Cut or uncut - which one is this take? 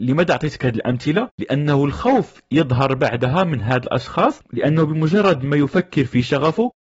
uncut